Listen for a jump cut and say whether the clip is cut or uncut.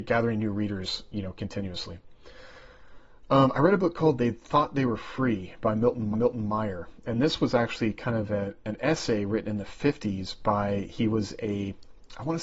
cut